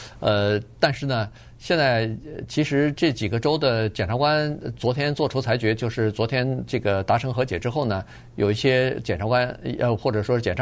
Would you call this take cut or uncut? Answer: uncut